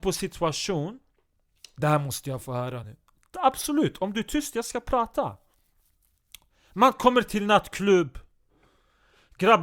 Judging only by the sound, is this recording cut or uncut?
uncut